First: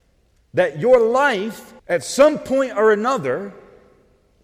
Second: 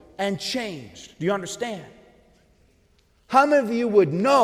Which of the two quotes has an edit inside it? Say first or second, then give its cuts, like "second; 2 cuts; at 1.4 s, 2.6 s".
first; 1 cut; at 1.8 s